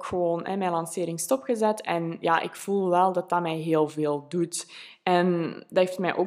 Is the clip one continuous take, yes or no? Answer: yes